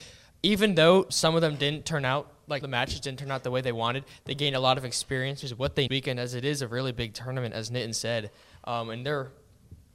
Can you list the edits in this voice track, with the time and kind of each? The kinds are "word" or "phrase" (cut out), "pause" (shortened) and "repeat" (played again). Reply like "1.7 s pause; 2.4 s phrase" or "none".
1.1 s word; 2.6 s phrase; 5.4 s word; 5.9 s phrase

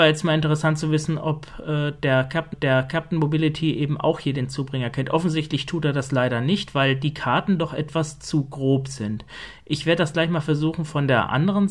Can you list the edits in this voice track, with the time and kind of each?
2.5 s repeat

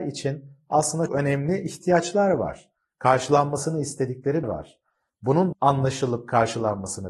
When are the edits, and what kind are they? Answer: 1.1 s word; 4.4 s word; 5.5 s word

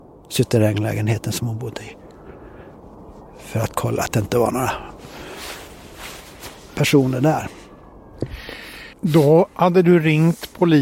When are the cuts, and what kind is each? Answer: 8.9 s pause

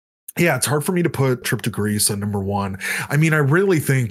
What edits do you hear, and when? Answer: 1.4 s word

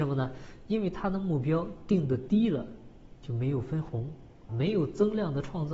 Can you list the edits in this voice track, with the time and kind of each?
4.5 s word

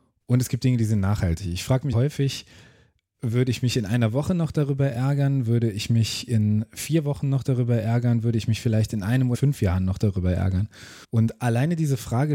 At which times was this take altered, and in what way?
1.9 s word; 9.3 s word; 11.0 s pause

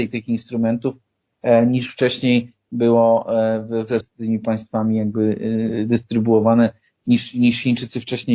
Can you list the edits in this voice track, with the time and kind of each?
4.0 s word

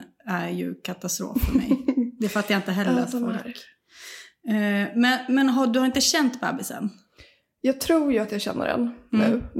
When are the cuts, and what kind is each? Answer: none

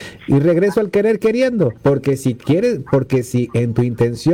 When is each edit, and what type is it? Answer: 1.8 s pause

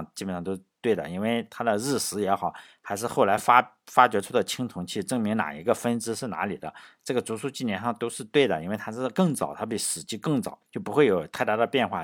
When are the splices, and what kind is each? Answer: 10.7 s pause

